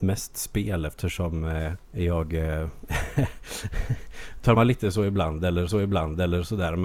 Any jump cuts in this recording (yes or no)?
yes